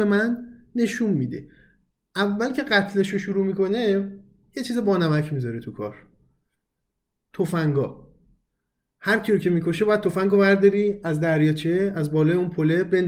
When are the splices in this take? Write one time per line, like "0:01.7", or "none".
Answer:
none